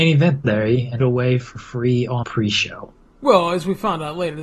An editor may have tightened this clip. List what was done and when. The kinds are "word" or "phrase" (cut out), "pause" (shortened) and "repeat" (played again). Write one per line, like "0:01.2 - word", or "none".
0:01.0 - phrase
0:02.2 - word
0:03.1 - pause